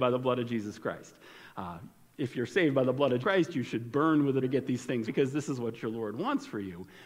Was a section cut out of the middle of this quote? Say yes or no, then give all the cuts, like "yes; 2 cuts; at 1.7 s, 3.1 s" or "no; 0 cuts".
yes; 3 cuts; at 3.2 s, 4.4 s, 5.0 s